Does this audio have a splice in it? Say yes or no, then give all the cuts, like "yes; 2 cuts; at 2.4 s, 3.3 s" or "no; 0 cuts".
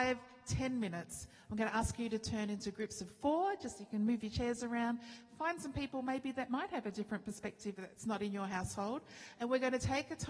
no; 0 cuts